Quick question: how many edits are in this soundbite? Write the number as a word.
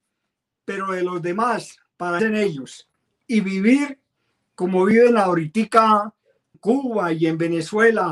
two